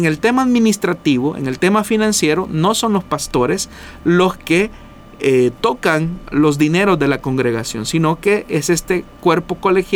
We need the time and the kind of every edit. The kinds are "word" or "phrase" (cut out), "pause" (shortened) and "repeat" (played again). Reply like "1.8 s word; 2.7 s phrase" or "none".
none